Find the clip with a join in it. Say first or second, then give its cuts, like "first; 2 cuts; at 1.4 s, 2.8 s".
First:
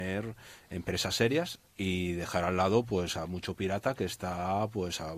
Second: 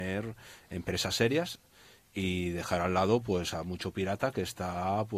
first; 1 cut; at 1.7 s